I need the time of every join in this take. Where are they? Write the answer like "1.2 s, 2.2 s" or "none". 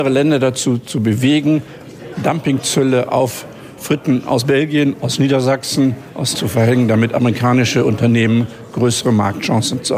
6.3 s